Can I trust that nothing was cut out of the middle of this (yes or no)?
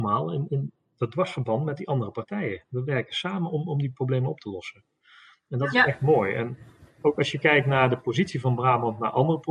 yes